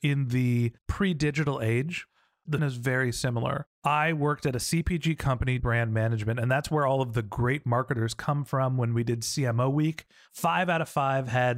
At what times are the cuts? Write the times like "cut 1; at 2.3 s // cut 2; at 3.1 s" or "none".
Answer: cut 1; at 2.6 s // cut 2; at 5.6 s